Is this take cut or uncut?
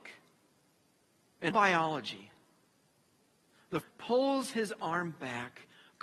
cut